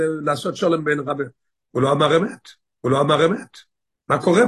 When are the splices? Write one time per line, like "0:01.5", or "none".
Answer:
0:02.8